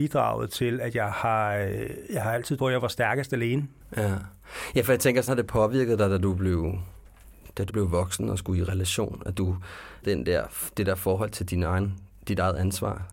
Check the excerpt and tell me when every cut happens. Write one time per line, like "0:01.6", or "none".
0:02.6
0:05.3
0:07.7
0:10.0